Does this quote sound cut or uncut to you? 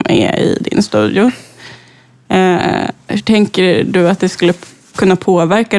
uncut